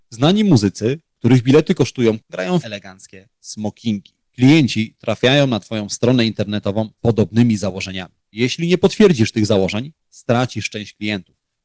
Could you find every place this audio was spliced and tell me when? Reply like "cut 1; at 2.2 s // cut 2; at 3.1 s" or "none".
cut 1; at 2.2 s // cut 2; at 2.6 s // cut 3; at 4.2 s // cut 4; at 7.0 s // cut 5; at 8.3 s